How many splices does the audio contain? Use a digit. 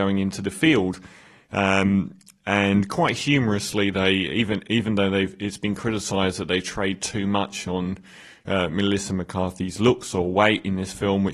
0